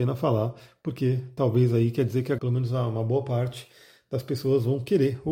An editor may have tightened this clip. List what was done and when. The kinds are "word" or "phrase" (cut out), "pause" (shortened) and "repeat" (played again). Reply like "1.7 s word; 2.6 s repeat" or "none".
2.4 s word